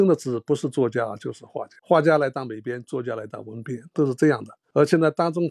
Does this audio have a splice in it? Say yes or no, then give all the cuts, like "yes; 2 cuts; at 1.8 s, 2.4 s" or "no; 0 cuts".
yes; 1 cut; at 1.8 s